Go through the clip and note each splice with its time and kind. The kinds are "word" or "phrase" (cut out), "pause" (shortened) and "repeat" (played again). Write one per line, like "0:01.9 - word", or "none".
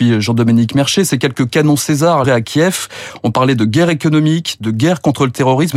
0:02.2 - word